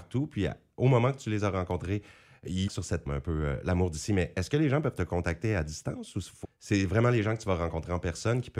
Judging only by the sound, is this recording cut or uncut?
cut